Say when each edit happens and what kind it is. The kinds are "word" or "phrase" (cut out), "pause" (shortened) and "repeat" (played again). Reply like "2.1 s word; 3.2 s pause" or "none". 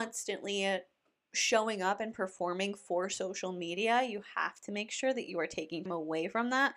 5.9 s word